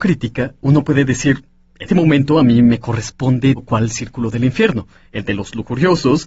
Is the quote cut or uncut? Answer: cut